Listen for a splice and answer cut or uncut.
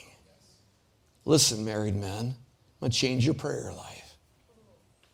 uncut